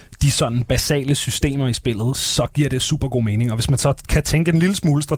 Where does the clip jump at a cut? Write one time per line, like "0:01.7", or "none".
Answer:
none

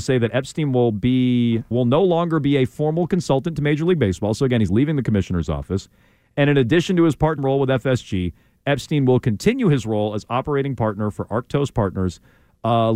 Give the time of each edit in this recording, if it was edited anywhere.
0:01.7
0:07.4

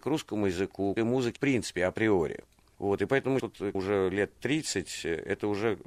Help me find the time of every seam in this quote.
0:01.0
0:01.4
0:03.4
0:03.7

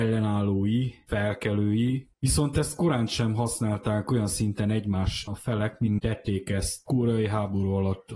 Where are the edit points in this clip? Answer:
0:02.1
0:05.3
0:06.0
0:06.9

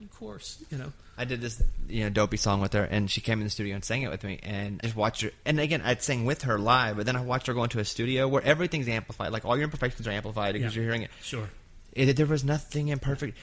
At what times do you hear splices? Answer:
0:04.8

